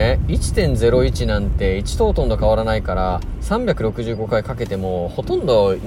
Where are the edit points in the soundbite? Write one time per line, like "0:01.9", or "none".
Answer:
none